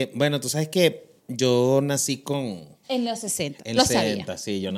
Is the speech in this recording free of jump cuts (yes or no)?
no